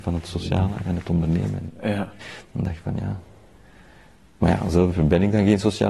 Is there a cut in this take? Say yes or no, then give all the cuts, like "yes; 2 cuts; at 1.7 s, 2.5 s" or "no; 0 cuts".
no; 0 cuts